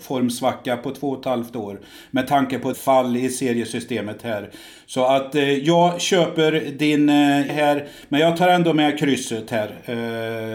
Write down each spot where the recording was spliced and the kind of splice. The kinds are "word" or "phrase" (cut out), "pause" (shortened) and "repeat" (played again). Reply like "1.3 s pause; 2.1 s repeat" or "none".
2.7 s word; 7.5 s word

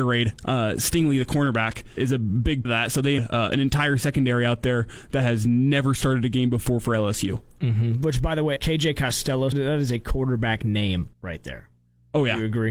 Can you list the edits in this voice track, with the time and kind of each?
2.0 s word; 2.6 s word; 3.2 s phrase; 8.6 s word; 9.5 s word; 11.1 s pause

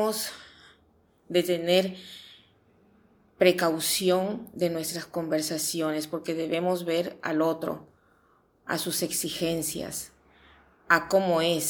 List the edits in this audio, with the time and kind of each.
none

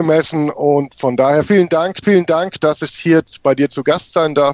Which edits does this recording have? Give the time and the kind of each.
2.0 s repeat; 2.9 s word

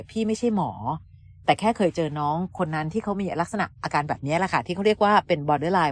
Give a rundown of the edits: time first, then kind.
none

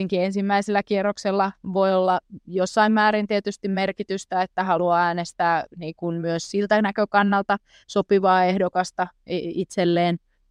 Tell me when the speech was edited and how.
none

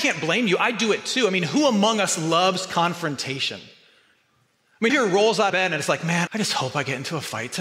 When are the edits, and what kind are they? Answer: 4.9 s word; 5.5 s word; 6.3 s word

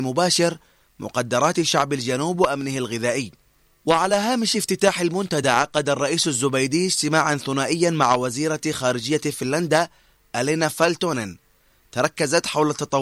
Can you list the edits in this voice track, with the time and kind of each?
none

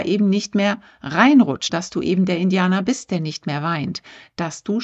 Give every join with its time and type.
1.7 s word

